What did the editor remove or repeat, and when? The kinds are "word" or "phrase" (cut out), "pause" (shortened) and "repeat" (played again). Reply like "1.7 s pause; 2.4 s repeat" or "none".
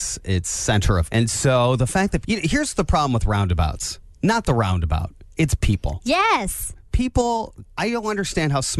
1.1 s word; 2.2 s word; 7.7 s pause

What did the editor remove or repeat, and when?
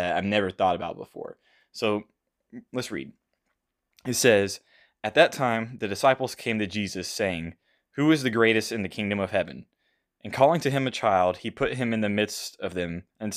none

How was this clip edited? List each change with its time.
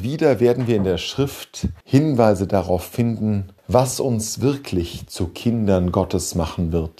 1.8 s pause; 3.6 s pause

